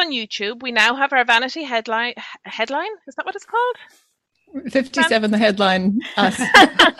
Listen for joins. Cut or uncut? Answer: cut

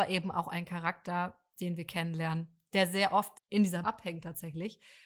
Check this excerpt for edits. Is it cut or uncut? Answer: cut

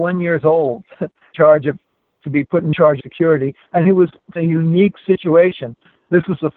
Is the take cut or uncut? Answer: cut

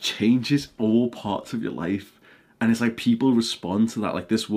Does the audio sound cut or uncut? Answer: uncut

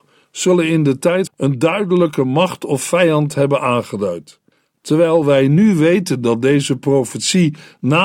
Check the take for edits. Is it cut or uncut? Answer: cut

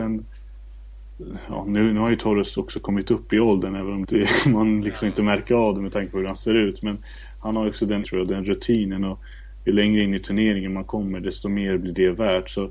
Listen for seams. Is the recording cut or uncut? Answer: cut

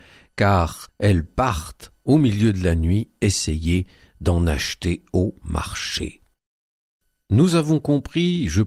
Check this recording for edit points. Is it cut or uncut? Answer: uncut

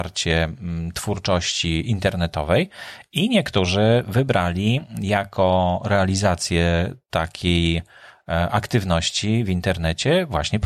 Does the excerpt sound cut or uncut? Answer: uncut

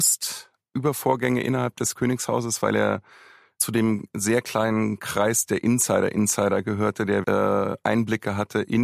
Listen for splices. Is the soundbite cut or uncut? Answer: cut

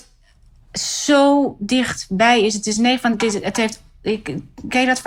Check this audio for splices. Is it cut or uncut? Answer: uncut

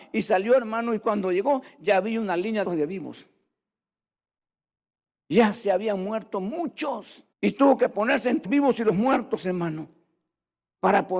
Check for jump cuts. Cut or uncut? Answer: cut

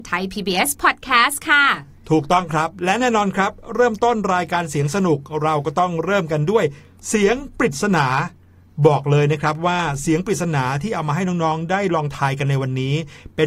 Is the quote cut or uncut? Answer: uncut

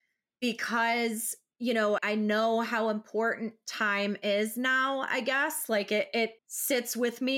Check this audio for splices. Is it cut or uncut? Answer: cut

